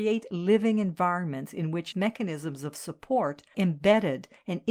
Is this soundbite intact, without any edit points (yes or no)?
no